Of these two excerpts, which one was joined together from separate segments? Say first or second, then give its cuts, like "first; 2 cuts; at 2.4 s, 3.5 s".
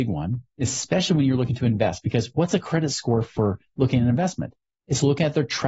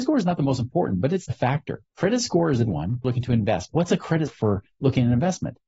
second; 6 cuts; at 1.3 s, 1.9 s, 2.7 s, 3.0 s, 3.7 s, 4.3 s